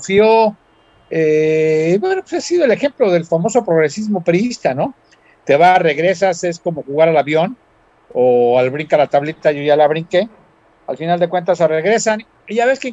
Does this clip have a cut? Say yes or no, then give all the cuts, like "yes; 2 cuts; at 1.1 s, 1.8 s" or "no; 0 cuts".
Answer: no; 0 cuts